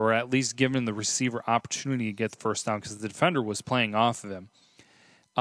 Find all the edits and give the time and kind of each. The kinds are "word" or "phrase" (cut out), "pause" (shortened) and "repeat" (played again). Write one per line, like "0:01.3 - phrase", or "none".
none